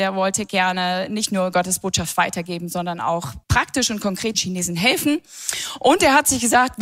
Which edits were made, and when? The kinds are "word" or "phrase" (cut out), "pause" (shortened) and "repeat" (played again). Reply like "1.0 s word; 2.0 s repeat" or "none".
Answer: 3.4 s pause; 4.3 s word

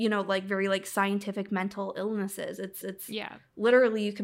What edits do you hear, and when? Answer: 2.8 s repeat

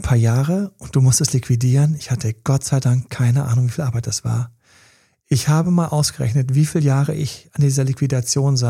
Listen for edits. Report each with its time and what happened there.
none

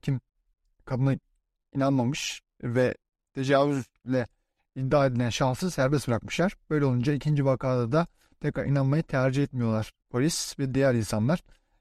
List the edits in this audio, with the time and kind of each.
none

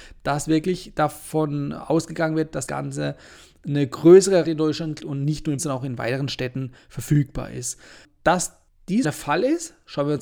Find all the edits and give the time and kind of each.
2.7 s word; 4.4 s word; 5.0 s word; 5.6 s word; 9.0 s word

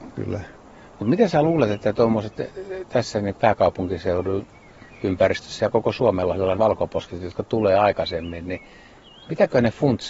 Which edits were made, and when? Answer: 3.3 s word; 6.6 s phrase

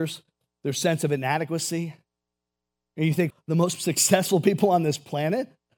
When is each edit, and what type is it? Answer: 3.3 s word

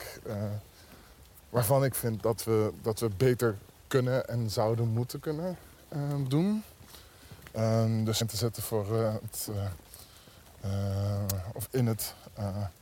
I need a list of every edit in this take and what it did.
8.2 s phrase

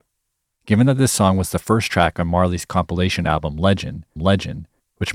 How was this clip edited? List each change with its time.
4.2 s repeat

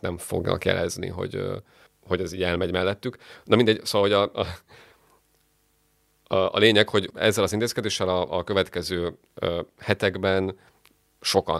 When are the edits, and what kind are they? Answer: none

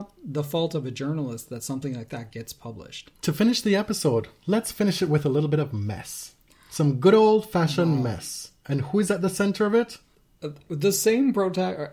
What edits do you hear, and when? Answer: 3.1 s pause

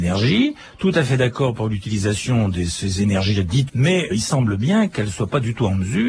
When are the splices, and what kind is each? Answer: 3.7 s word; 4.1 s word

